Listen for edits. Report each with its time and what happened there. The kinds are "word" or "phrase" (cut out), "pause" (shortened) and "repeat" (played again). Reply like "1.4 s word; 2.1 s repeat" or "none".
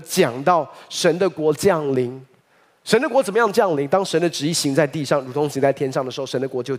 2.4 s pause